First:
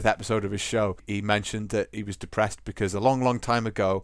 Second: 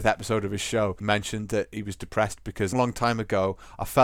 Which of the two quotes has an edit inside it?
second; 2 cuts; at 1.0 s, 2.7 s

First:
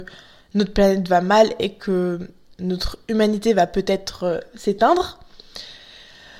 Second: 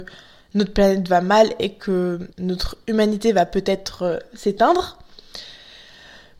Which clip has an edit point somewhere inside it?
second; 1 cut; at 2.3 s

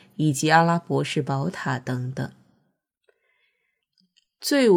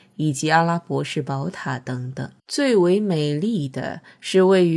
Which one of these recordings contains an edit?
second; 1 cut; at 2.4 s

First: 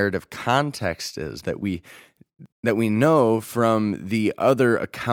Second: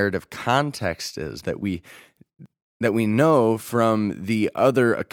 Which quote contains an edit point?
first; 1 cut; at 2.5 s

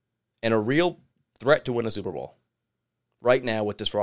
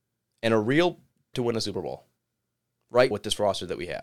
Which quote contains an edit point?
second; 2 cuts; at 1.3 s, 3.1 s

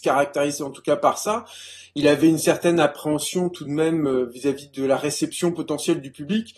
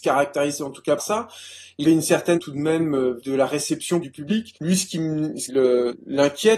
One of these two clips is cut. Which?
second; 6 cuts; at 1.0 s, 1.8 s, 2.4 s, 3.2 s, 4.0 s, 5.5 s

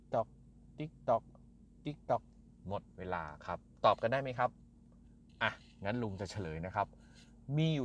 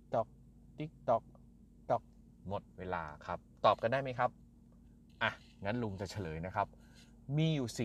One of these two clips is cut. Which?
second; 1 cut; at 1.8 s

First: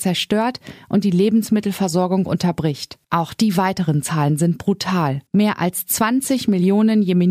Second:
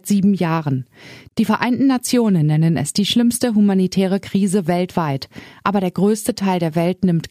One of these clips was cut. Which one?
first; 2 cuts; at 3.0 s, 5.3 s

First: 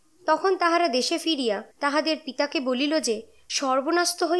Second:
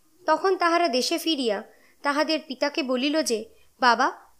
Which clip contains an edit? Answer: first; 2 cuts; at 1.7 s, 3.5 s

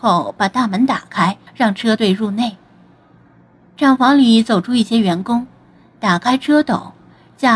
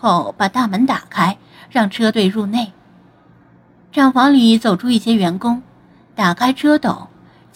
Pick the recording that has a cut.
first; 1 cut; at 1.5 s

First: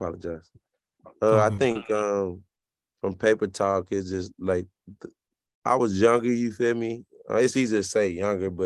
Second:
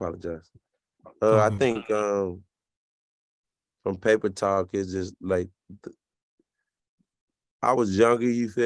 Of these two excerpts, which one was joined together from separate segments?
first; 2 cuts; at 2.6 s, 5.3 s

